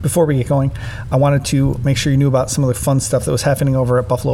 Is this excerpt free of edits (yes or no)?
yes